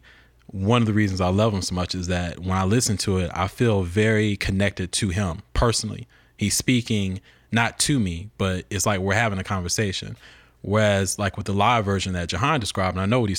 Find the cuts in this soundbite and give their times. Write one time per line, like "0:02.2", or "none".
none